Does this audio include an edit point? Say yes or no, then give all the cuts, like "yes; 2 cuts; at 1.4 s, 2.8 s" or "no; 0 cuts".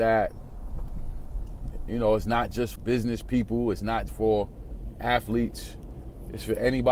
yes; 2 cuts; at 2.8 s, 4.1 s